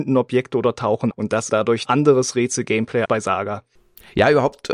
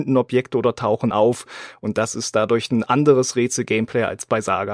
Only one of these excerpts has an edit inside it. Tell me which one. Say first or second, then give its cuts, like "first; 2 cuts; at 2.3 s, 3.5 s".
first; 4 cuts; at 1.1 s, 1.5 s, 1.8 s, 3.1 s